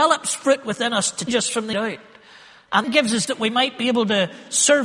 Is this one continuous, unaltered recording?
no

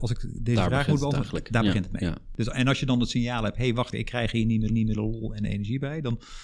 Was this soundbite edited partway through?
yes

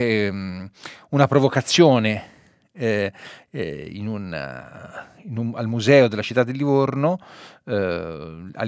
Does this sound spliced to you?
no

